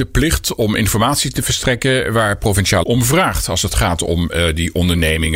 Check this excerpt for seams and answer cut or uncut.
cut